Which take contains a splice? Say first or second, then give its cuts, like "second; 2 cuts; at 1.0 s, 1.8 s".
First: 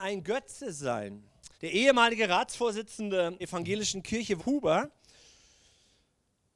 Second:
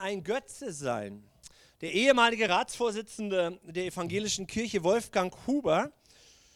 first; 3 cuts; at 1.5 s, 3.4 s, 4.4 s